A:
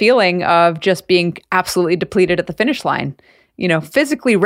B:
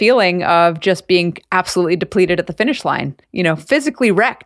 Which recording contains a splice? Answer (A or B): B